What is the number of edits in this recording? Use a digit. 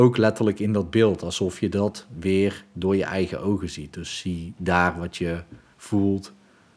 0